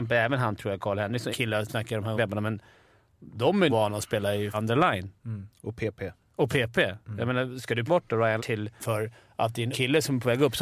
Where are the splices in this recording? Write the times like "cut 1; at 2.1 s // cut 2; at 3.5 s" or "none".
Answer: cut 1; at 1.3 s // cut 2; at 1.7 s // cut 3; at 2.2 s // cut 4; at 3.7 s // cut 5; at 4.5 s // cut 6; at 7.9 s // cut 7; at 8.4 s // cut 8; at 8.8 s // cut 9; at 9.7 s